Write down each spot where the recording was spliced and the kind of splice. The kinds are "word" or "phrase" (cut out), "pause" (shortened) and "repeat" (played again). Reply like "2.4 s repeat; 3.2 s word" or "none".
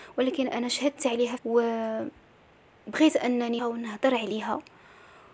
1.4 s phrase; 3.6 s word